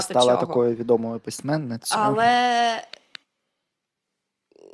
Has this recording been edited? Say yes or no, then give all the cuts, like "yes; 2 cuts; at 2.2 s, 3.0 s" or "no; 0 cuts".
no; 0 cuts